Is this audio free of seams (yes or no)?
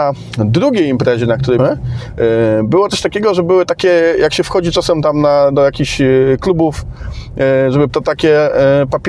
no